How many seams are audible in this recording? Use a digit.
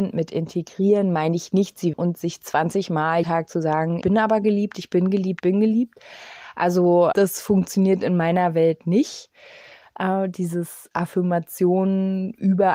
5